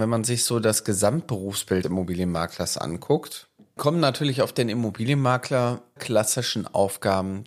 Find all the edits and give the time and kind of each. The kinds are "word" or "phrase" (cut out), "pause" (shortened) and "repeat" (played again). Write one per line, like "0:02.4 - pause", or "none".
0:01.8 - word
0:03.8 - word
0:06.0 - word